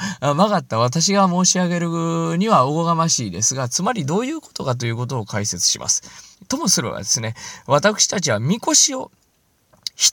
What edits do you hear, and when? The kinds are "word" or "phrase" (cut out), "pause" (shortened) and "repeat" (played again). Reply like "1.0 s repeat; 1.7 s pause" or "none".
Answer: 6.3 s pause